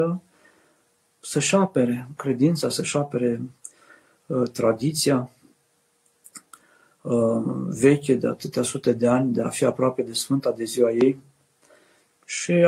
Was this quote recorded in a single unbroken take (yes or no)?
yes